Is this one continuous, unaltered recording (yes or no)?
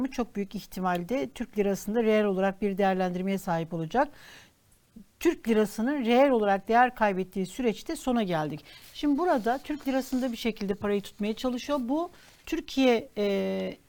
yes